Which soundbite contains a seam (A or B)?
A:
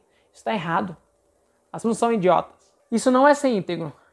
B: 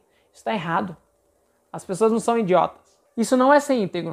A